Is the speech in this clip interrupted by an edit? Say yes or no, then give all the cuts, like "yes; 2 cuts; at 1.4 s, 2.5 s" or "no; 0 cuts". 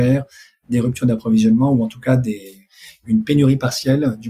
no; 0 cuts